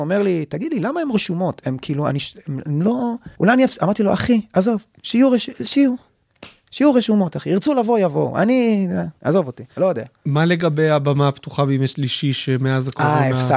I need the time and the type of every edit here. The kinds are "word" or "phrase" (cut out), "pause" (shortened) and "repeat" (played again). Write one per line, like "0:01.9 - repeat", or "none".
0:03.3 - pause
0:09.2 - pause
0:09.7 - pause